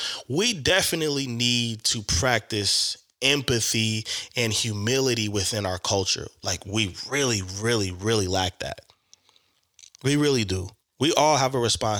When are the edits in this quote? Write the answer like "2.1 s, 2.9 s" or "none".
none

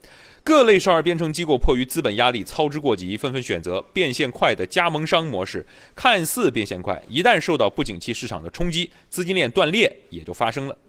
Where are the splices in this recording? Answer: none

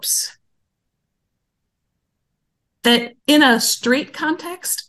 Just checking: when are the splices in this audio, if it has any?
3.2 s

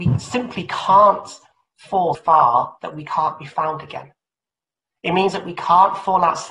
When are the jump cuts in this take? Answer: 2.1 s

